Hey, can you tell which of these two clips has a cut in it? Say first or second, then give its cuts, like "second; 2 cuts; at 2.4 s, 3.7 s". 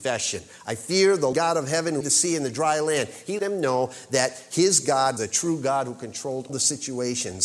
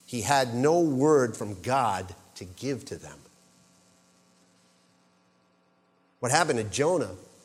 first; 5 cuts; at 1.3 s, 2.0 s, 3.4 s, 5.2 s, 6.5 s